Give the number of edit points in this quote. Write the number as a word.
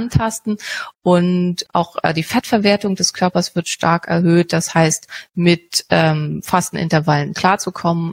one